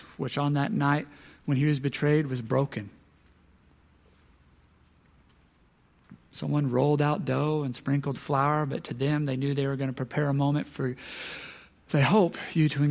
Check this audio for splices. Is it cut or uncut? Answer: uncut